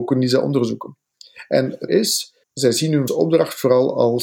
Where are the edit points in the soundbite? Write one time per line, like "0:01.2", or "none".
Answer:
0:01.9
0:02.4
0:03.1